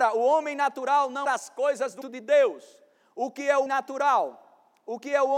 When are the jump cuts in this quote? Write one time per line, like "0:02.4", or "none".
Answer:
0:01.2
0:02.0
0:03.7